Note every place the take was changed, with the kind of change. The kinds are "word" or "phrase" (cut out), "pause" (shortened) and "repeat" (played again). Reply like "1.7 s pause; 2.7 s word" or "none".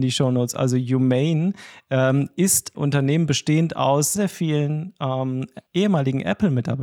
2.7 s word; 4.2 s word; 5.7 s pause

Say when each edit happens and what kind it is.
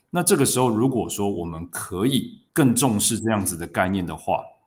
2.5 s pause

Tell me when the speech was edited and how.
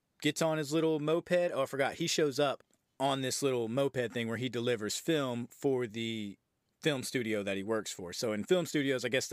none

